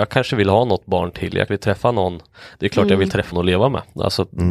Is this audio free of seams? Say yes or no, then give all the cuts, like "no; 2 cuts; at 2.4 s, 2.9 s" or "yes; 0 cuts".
no; 2 cuts; at 1.5 s, 3.3 s